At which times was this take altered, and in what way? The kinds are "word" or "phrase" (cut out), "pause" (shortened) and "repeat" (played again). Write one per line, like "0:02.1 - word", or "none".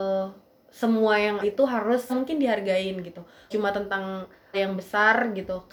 0:01.4 - word
0:02.1 - word
0:03.5 - word
0:04.5 - word